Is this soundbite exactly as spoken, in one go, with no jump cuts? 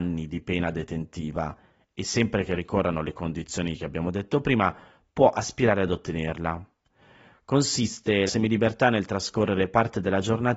no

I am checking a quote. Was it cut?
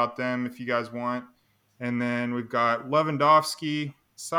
no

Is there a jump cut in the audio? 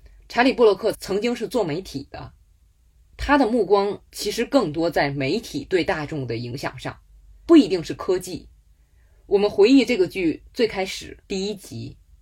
yes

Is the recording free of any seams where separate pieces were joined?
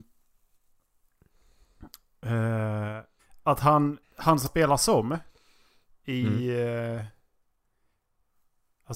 no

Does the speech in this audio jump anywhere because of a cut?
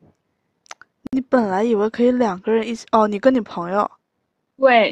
no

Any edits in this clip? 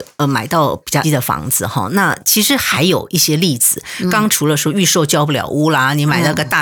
yes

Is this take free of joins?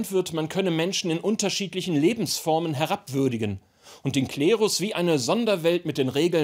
yes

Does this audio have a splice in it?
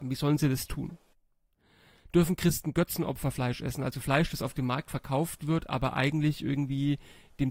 no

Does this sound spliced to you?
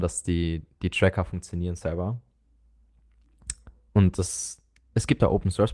no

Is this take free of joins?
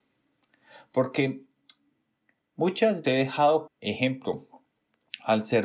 no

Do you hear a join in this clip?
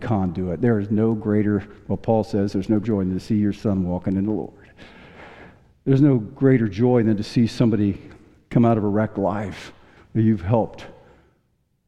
yes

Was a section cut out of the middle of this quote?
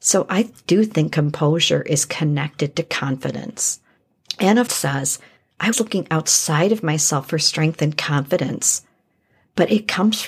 yes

